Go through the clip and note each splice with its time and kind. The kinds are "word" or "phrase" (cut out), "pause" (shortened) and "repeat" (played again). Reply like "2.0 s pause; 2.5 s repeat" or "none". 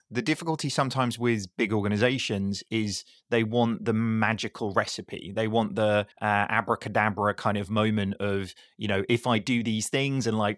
6.1 s pause